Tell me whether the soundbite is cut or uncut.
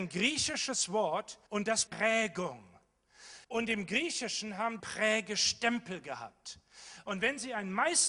cut